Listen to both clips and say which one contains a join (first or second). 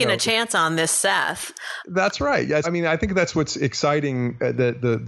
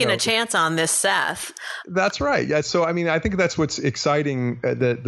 first